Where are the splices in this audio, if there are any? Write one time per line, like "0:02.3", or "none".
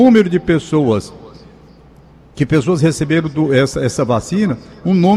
none